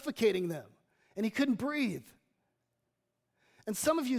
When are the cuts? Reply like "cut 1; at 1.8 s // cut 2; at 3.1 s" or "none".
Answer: none